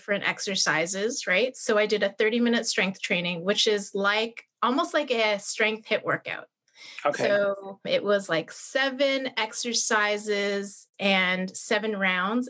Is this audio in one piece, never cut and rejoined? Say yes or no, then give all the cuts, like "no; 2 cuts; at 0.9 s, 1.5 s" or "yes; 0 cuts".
yes; 0 cuts